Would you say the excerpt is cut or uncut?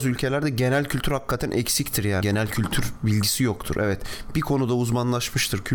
cut